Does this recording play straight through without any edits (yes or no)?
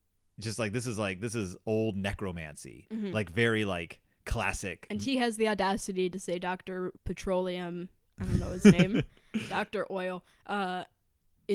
no